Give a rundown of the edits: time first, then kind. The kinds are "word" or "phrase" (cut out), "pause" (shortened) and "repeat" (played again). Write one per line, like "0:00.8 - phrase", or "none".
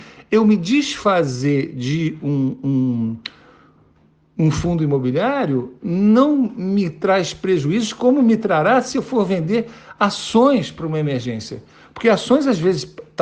none